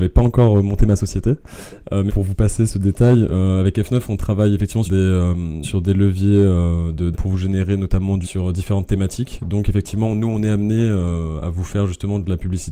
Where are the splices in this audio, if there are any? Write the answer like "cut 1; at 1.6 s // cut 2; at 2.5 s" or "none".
cut 1; at 2.1 s // cut 2; at 2.7 s // cut 3; at 4.9 s // cut 4; at 5.6 s // cut 5; at 7.1 s // cut 6; at 8.2 s